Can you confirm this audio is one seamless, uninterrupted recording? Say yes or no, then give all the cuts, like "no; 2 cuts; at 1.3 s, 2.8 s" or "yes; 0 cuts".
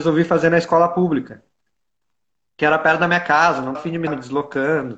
no; 2 cuts; at 3.7 s, 4.1 s